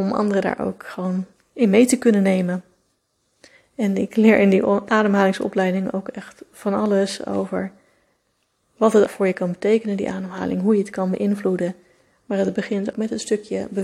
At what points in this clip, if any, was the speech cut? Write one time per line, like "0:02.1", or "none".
0:09.1
0:12.9